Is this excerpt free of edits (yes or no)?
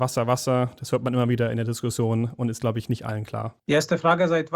no